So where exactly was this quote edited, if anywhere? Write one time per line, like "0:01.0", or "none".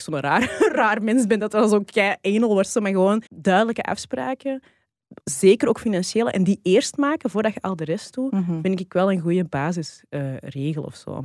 0:03.3
0:05.2